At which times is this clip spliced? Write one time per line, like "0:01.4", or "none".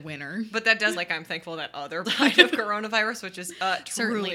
0:00.9
0:02.0